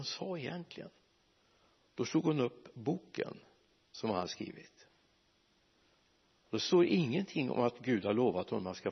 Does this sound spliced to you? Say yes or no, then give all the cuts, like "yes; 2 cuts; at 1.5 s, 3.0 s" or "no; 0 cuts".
no; 0 cuts